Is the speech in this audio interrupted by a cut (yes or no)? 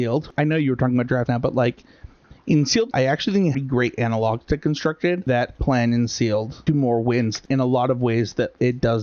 yes